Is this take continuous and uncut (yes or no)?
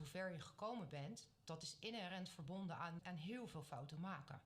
no